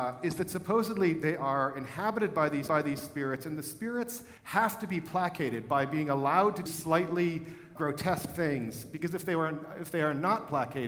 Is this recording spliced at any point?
yes; 4 cuts; at 2.7 s, 4.4 s, 6.7 s, 7.8 s

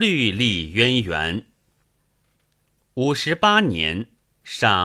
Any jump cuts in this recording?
no; 0 cuts

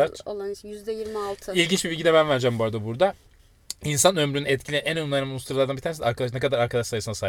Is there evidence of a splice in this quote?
no; 0 cuts

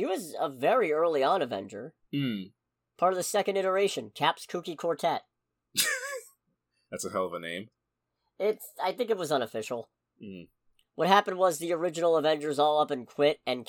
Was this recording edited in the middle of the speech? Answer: no; 0 cuts

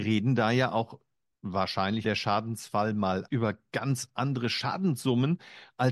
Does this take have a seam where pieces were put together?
yes; 2 cuts; at 2.0 s, 3.3 s

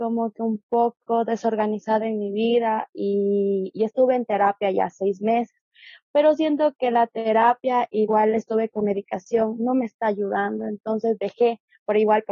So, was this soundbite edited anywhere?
no; 0 cuts

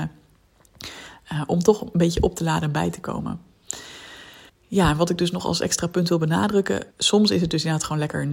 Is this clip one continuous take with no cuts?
no; 2 cuts; at 4.5 s, 6.9 s

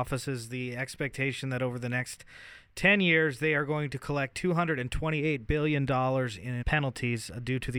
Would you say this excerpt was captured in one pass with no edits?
no; 1 cut; at 6.6 s

